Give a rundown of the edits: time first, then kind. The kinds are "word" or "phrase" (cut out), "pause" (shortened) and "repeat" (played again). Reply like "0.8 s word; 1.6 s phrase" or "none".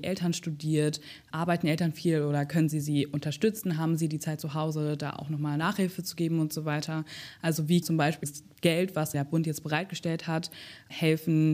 1.3 s word; 7.8 s word; 8.2 s word; 9.1 s word